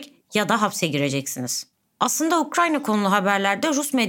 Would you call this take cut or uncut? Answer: uncut